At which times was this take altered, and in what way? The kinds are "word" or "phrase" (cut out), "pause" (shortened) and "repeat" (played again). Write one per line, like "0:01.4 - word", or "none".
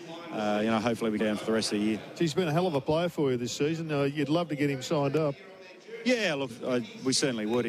0:01.2 - phrase
0:06.5 - word